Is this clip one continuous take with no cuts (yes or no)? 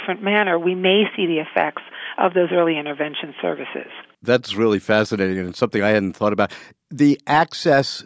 yes